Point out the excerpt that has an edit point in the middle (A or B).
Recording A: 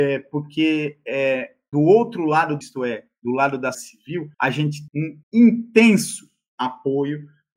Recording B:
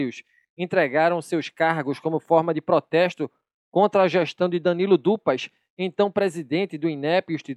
A